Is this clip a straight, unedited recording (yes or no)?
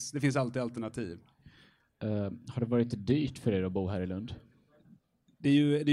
yes